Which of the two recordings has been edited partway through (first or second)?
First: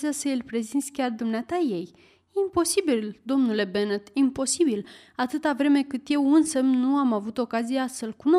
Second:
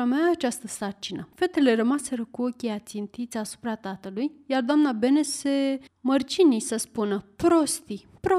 second